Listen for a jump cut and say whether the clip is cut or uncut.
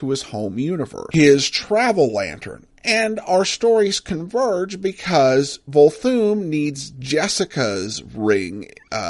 uncut